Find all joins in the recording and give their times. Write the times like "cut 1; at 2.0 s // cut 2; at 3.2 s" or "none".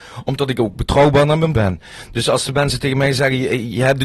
cut 1; at 1.5 s